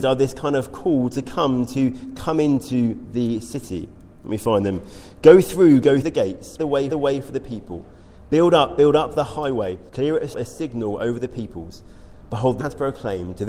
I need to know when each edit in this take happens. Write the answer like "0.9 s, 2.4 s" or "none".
6.0 s, 6.6 s, 6.9 s, 9.9 s, 10.3 s, 12.6 s

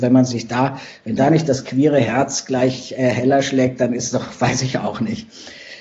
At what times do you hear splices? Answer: none

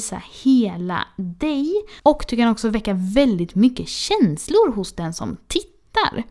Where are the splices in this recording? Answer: 2.0 s

